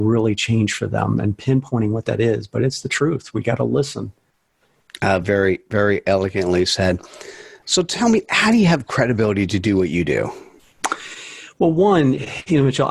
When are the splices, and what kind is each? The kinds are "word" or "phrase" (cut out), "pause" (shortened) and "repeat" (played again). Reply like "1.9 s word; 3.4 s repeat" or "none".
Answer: none